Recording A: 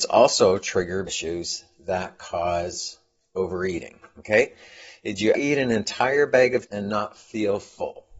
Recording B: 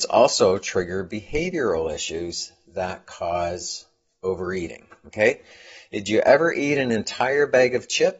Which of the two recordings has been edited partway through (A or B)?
A